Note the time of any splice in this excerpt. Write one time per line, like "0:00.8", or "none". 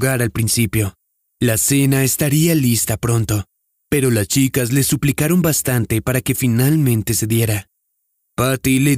none